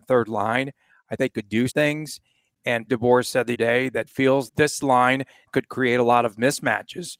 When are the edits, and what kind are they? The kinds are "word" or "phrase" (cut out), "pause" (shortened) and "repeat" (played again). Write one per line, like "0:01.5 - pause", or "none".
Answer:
0:01.2 - word
0:01.7 - word
0:02.9 - word
0:03.5 - word
0:04.1 - word
0:04.5 - word
0:05.5 - word